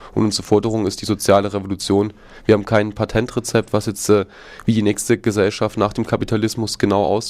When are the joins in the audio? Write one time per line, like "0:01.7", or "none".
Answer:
none